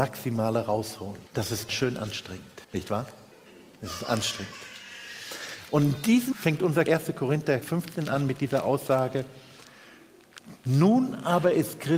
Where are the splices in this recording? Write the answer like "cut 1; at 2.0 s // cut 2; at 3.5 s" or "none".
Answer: cut 1; at 1.3 s // cut 2; at 1.7 s // cut 3; at 2.6 s // cut 4; at 3.3 s // cut 5; at 6.3 s // cut 6; at 6.9 s // cut 7; at 7.6 s